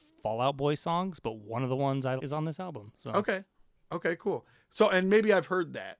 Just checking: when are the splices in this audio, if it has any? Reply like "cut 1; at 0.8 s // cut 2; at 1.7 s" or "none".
cut 1; at 2.2 s